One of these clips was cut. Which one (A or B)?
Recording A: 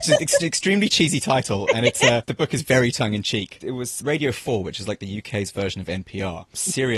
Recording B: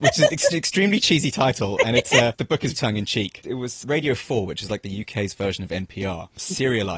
B